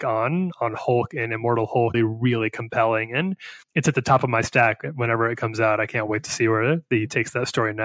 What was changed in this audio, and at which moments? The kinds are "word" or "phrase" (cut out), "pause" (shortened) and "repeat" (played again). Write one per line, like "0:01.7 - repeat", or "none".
0:01.9 - phrase
0:03.6 - pause